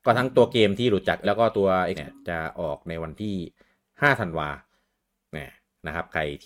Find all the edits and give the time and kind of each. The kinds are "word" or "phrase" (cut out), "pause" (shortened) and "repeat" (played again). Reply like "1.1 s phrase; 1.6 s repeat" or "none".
1.2 s word; 1.9 s word